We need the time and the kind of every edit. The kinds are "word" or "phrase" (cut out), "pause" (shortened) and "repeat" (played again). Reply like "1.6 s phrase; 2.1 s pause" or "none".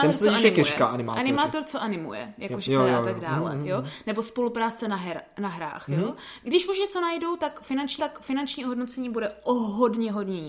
2.7 s phrase; 8.0 s repeat